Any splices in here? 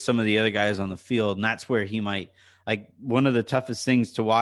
no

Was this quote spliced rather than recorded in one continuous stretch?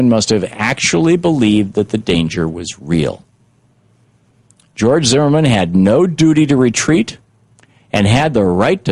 no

